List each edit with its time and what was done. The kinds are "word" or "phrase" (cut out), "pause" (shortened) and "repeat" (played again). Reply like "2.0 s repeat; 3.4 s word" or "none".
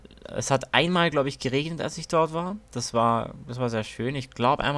2.6 s pause